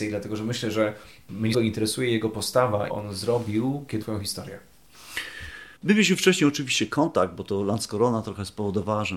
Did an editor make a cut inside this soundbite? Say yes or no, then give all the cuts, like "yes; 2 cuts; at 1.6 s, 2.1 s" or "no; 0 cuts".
yes; 4 cuts; at 1.5 s, 2.9 s, 4.0 s, 5.8 s